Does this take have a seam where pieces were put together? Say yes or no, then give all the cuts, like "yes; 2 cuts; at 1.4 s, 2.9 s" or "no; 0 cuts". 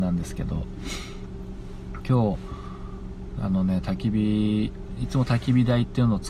yes; 1 cut; at 2.0 s